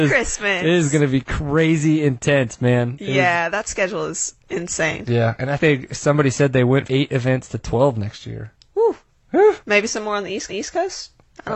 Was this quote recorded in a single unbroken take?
no; 5 cuts; at 4.4 s, 5.6 s, 6.9 s, 9.6 s, 10.5 s

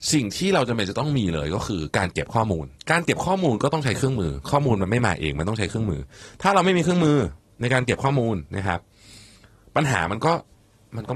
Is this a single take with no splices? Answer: no; 1 cut; at 2.8 s

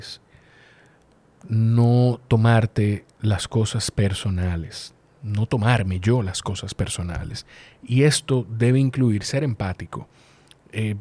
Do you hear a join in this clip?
no; 0 cuts

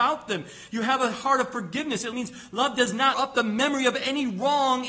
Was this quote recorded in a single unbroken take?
no; 2 cuts; at 2.1 s, 3.1 s

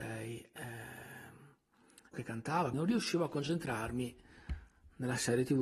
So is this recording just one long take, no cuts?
no; 2 cuts; at 2.1 s, 2.7 s

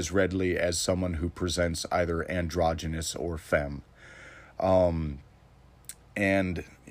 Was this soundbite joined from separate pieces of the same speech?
no; 0 cuts

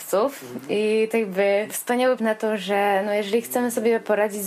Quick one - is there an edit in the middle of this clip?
yes; 2 cuts; at 1.1 s, 2.2 s

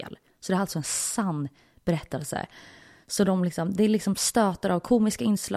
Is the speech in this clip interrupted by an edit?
no; 0 cuts

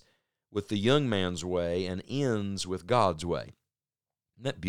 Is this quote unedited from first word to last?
yes; 0 cuts

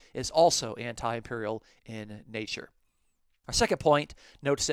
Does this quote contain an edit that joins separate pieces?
no; 0 cuts

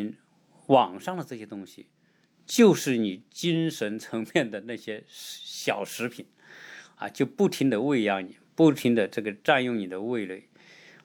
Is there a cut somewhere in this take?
no; 0 cuts

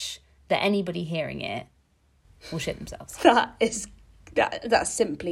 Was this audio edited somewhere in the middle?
no; 0 cuts

